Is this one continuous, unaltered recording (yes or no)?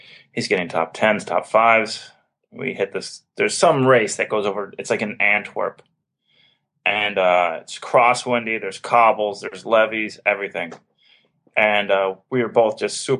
yes